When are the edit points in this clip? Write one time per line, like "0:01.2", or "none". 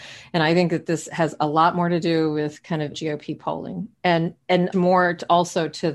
0:02.9
0:04.7